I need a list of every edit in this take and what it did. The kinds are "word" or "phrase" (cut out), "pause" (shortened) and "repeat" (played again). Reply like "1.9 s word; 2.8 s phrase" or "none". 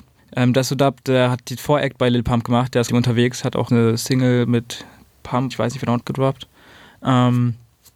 2.9 s phrase; 3.7 s word; 5.5 s word; 6.0 s phrase